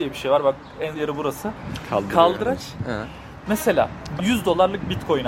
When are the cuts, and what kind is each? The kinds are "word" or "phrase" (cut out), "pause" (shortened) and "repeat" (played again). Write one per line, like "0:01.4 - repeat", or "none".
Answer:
0:00.9 - word
0:04.2 - word